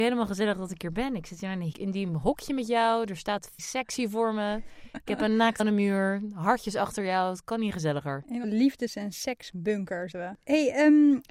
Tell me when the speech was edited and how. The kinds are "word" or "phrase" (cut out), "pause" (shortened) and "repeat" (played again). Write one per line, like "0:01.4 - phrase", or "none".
0:01.7 - word
0:03.6 - word
0:05.6 - word
0:08.4 - word
0:10.1 - word